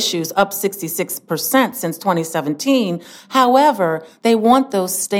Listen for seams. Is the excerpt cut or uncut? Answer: uncut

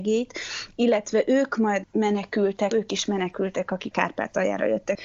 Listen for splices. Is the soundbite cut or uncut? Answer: cut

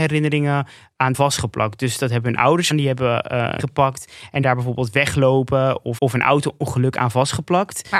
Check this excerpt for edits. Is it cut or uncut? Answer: cut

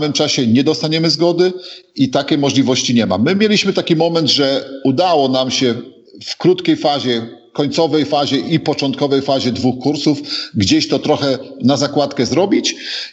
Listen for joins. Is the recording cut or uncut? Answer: uncut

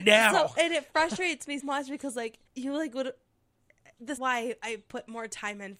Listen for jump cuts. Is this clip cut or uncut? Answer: cut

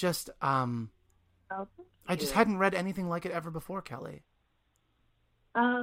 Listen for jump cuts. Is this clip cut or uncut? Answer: uncut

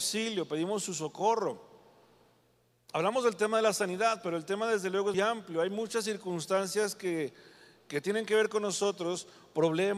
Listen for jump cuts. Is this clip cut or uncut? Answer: cut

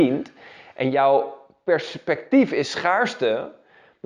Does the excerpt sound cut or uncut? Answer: uncut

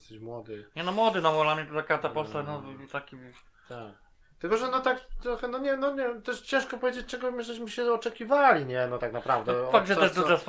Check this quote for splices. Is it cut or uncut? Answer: uncut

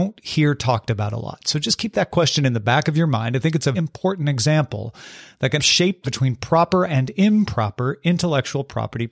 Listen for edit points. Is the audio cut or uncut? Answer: cut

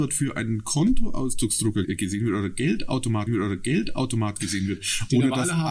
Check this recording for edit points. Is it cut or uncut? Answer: cut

